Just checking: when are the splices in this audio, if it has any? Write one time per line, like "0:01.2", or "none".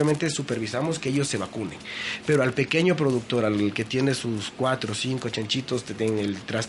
none